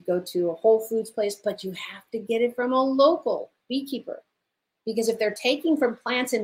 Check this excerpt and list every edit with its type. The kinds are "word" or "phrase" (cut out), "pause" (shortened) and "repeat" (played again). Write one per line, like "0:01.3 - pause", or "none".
none